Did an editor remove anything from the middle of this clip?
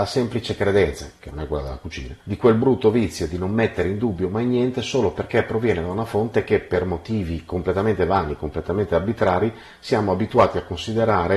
yes; 1 cut; at 2.2 s

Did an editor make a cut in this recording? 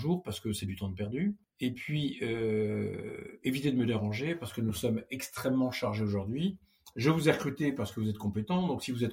no; 0 cuts

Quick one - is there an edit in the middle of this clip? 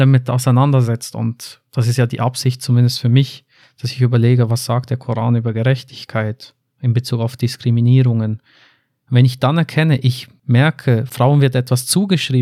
no; 0 cuts

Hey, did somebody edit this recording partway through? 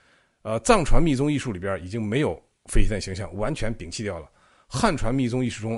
no; 0 cuts

